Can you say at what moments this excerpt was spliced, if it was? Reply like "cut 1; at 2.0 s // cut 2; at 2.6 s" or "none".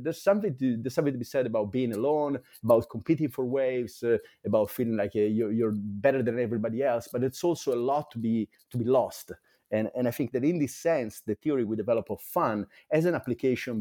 none